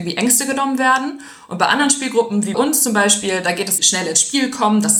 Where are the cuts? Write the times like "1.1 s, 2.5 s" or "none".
2.5 s, 3.8 s